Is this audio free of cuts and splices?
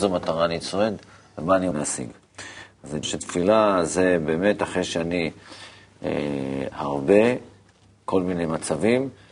no; 3 cuts; at 1.7 s, 3.0 s, 6.7 s

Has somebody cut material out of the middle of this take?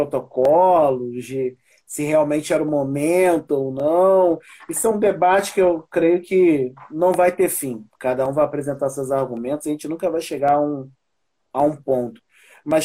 no; 0 cuts

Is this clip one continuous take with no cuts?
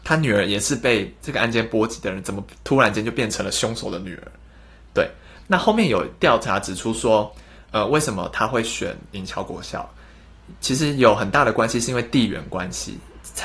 yes; 0 cuts

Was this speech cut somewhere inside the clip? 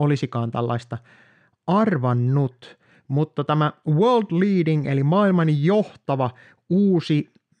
no; 0 cuts

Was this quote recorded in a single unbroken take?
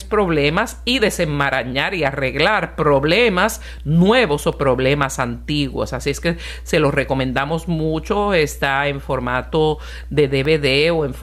yes; 0 cuts

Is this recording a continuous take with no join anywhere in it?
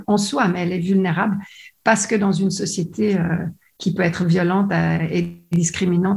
yes; 0 cuts

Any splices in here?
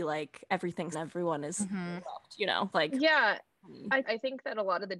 yes; 3 cuts; at 0.9 s, 2.7 s, 4.0 s

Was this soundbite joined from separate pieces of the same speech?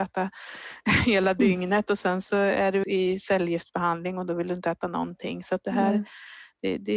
yes; 1 cut; at 2.8 s

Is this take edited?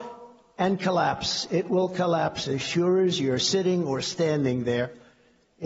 no; 0 cuts

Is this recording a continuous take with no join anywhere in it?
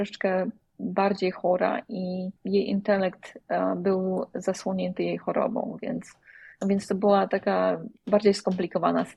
no; 2 cuts; at 2.4 s, 6.5 s

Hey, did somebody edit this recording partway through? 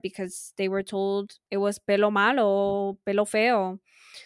yes; 1 cut; at 1.4 s

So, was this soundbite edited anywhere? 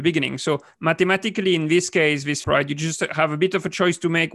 yes; 1 cut; at 2.4 s

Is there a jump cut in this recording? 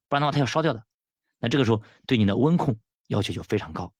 no; 0 cuts

